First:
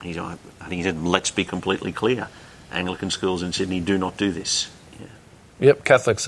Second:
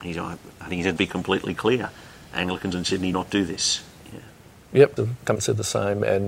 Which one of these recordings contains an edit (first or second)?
second